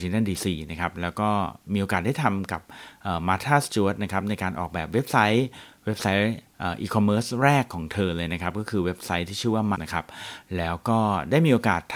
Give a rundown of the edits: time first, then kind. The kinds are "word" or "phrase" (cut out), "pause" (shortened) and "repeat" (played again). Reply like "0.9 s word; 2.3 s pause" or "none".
6.5 s pause; 9.7 s phrase